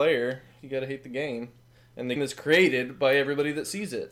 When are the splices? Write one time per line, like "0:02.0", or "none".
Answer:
0:02.2